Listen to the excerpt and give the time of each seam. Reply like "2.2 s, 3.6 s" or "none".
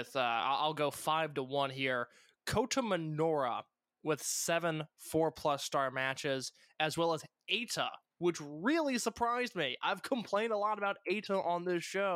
none